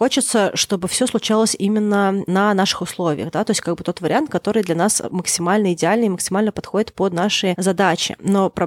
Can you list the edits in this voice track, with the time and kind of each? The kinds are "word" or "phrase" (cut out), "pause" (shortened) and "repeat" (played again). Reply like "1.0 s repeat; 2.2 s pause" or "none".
none